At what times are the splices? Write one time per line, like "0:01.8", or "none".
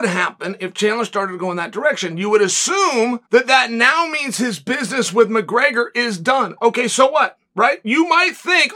0:03.3